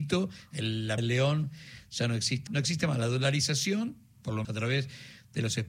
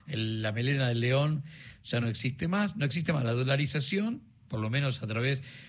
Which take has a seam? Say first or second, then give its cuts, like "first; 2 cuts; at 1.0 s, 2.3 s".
first; 3 cuts; at 1.0 s, 2.5 s, 4.4 s